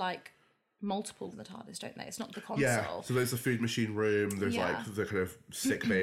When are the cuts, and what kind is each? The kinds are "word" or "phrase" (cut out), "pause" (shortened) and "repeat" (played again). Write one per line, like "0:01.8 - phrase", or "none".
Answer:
0:01.3 - word
0:02.3 - word